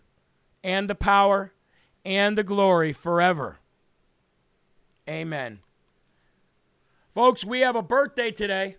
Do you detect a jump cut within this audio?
no; 0 cuts

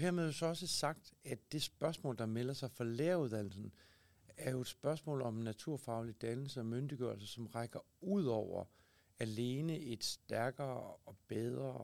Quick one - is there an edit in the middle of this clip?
no; 0 cuts

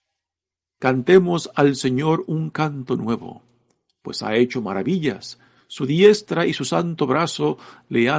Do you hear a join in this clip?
no; 0 cuts

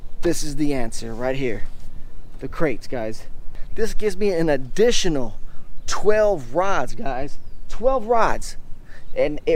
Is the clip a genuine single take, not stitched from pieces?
yes; 0 cuts

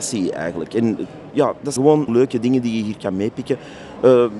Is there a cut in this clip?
yes; 3 cuts; at 1.3 s, 1.8 s, 2.1 s

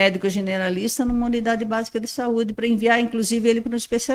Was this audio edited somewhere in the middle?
no; 0 cuts

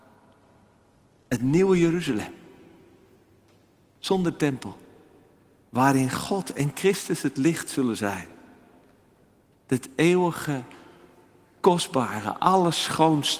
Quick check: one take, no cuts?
yes; 0 cuts

